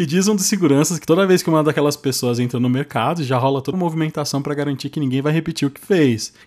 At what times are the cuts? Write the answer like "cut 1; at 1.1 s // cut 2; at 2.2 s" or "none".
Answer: cut 1; at 3.7 s